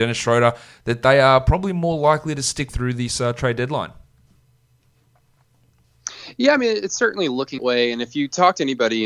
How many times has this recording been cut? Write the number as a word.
two